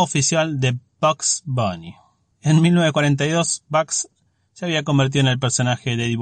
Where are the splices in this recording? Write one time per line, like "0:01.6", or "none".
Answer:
none